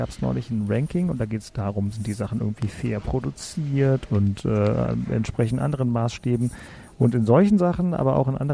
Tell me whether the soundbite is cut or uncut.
uncut